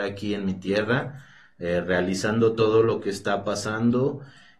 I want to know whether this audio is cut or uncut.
uncut